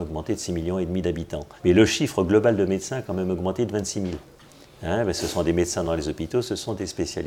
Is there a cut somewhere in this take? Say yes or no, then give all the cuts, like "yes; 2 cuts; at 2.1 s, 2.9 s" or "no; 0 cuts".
no; 0 cuts